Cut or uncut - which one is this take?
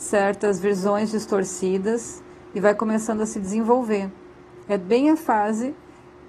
uncut